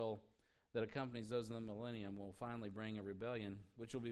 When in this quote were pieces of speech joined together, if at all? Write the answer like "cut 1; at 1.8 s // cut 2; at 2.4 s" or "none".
none